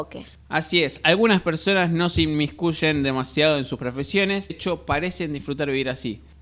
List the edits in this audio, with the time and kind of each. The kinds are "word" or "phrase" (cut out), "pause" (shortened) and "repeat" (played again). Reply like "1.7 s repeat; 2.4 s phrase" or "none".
4.5 s word